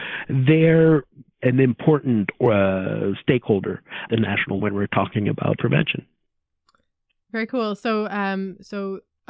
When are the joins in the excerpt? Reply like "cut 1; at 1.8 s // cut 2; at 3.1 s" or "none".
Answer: cut 1; at 1.3 s // cut 2; at 4.1 s // cut 3; at 4.6 s // cut 4; at 5.6 s